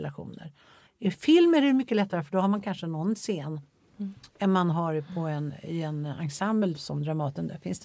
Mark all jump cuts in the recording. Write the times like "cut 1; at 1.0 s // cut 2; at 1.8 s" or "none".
none